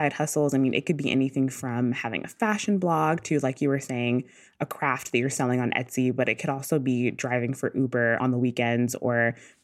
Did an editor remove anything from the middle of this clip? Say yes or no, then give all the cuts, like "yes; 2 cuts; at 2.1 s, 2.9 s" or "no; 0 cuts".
no; 0 cuts